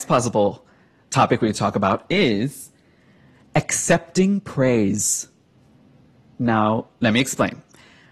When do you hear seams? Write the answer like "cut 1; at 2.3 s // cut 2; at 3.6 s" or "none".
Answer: none